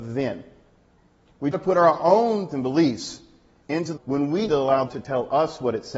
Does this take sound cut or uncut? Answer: cut